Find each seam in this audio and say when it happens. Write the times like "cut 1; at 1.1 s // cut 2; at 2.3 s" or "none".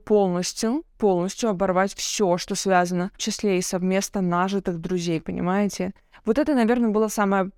cut 1; at 3.2 s